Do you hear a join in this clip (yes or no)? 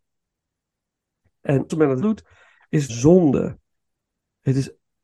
yes